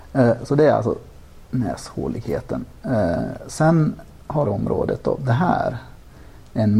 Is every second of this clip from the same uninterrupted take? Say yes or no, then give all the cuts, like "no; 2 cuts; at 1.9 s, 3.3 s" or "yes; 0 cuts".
no; 1 cut; at 4.4 s